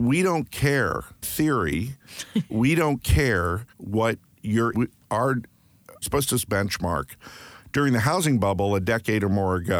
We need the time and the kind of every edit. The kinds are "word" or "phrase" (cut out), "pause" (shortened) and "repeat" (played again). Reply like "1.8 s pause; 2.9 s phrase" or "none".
1.2 s word; 2.5 s word; 3.7 s pause; 4.7 s phrase; 6.0 s word; 6.5 s phrase